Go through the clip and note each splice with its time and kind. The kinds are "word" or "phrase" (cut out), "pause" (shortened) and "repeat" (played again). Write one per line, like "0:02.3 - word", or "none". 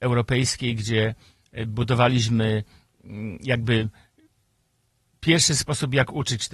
none